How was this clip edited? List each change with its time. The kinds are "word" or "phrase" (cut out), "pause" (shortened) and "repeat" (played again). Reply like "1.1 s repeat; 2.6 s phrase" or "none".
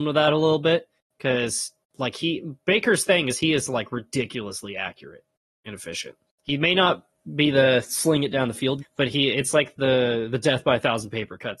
8.8 s word